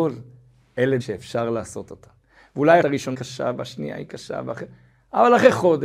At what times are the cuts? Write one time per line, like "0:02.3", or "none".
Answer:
0:01.0
0:02.8
0:03.1